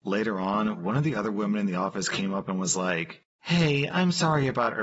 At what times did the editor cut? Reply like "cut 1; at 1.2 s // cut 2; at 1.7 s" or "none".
none